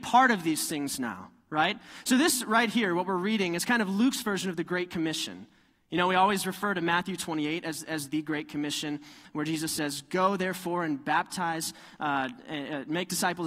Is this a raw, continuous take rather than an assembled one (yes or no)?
yes